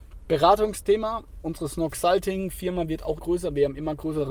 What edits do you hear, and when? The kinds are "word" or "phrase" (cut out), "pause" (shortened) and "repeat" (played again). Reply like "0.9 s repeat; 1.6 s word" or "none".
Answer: 3.2 s word